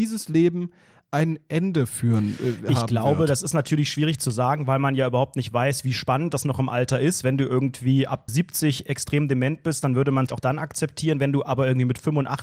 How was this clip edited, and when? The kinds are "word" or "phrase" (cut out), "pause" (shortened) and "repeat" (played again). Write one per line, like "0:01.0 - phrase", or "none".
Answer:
0:08.3 - word
0:10.3 - phrase